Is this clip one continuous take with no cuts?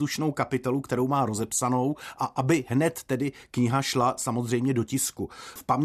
yes; 0 cuts

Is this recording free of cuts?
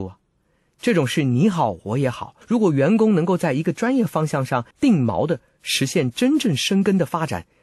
no; 2 cuts; at 2.4 s, 4.7 s

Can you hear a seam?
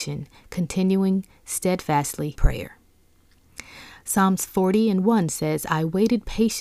yes; 1 cut; at 2.4 s

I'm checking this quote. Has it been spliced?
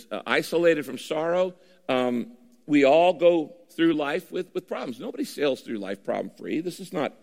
no; 0 cuts

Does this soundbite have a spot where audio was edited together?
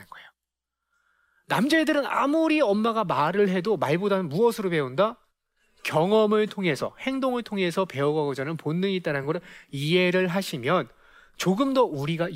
no; 0 cuts

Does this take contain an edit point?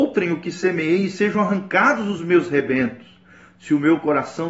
no; 0 cuts

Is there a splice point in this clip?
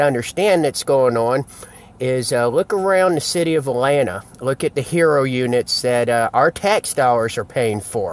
no; 0 cuts

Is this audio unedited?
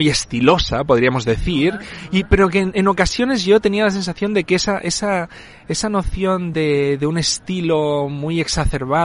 yes; 0 cuts

